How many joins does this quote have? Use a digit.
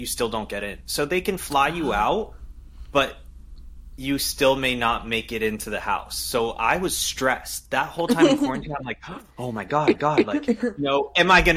1